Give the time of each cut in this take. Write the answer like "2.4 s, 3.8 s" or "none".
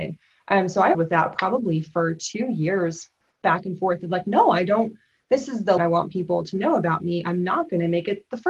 0.9 s, 5.8 s